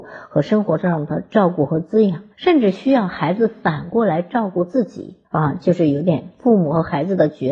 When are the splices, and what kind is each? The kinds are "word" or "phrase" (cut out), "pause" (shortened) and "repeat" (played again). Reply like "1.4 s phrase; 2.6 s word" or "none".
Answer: 2.3 s pause; 5.2 s pause